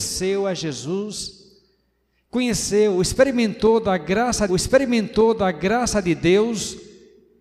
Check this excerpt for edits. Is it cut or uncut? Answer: cut